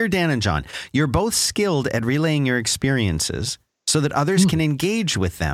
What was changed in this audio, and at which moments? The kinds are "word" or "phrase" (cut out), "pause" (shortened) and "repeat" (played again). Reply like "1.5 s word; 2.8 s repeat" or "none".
none

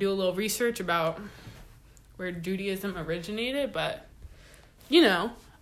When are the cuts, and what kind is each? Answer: none

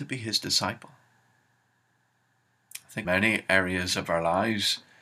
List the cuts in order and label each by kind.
3.0 s word

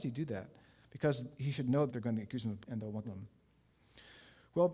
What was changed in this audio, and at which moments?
1.3 s word; 1.9 s word; 2.6 s word; 3.0 s phrase

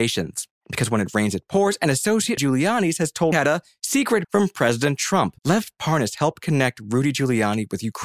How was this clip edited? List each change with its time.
2.4 s phrase; 3.3 s phrase; 4.2 s word; 5.4 s pause

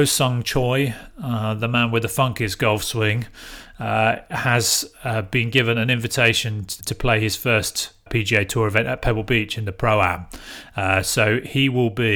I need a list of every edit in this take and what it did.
6.8 s word; 8.1 s word

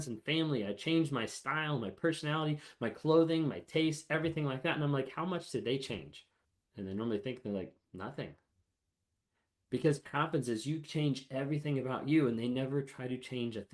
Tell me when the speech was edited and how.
6.4 s pause; 7.8 s pause; 10.0 s word

